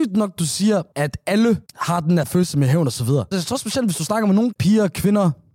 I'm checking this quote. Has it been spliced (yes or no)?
yes